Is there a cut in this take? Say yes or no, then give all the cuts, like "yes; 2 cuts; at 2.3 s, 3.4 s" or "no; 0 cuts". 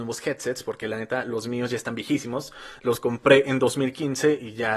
no; 0 cuts